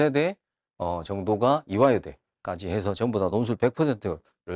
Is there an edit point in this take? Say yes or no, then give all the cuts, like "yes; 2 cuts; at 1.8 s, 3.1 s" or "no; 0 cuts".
no; 0 cuts